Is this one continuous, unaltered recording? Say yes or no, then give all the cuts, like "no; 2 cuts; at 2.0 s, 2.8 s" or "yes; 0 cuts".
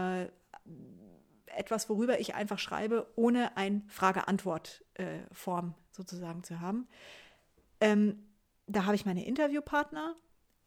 yes; 0 cuts